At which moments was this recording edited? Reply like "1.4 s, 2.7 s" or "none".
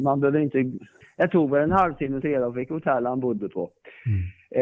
1.0 s, 2.2 s